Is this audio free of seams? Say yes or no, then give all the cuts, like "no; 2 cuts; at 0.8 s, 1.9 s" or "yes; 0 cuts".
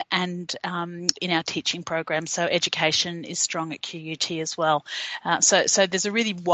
no; 1 cut; at 1.2 s